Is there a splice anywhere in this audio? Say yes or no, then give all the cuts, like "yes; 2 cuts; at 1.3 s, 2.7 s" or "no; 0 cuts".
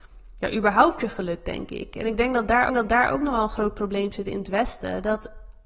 yes; 1 cut; at 2.7 s